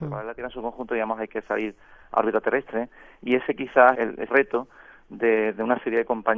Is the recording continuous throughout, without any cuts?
no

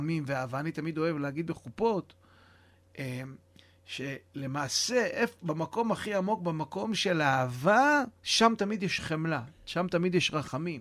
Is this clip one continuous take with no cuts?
no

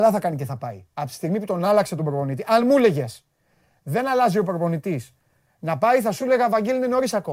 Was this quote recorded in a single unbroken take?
yes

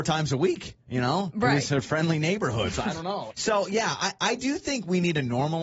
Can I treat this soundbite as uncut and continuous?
no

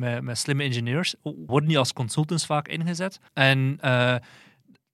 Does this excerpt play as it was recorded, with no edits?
no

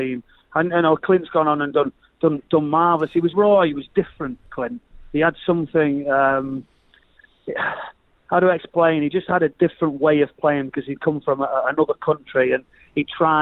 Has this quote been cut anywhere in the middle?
yes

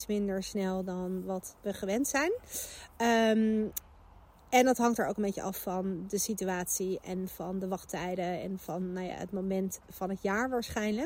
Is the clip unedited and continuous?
yes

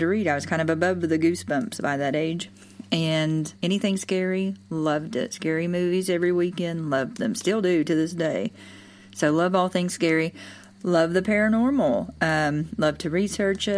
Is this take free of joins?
no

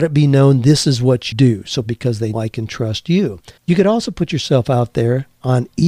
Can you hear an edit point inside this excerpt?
yes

